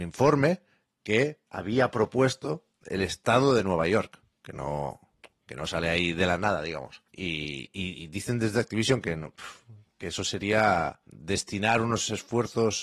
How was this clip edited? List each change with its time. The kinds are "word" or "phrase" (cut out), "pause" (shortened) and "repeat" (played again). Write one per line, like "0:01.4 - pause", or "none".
0:01.5 - pause
0:02.7 - pause
0:07.1 - pause
0:11.0 - pause